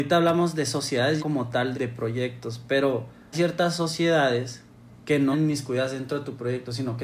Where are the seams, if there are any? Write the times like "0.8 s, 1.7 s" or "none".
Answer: 1.2 s, 1.7 s, 3.3 s, 5.3 s